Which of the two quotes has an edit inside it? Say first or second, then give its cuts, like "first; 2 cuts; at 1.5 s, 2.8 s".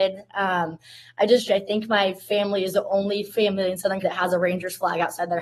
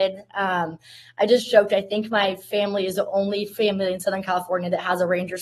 first; 2 cuts; at 1.5 s, 4.0 s